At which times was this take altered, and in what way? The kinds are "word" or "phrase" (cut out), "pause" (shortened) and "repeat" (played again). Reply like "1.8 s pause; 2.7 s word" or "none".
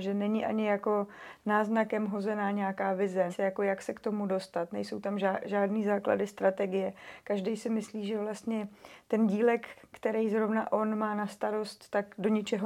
3.3 s word